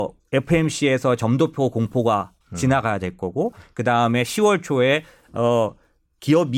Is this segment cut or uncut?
cut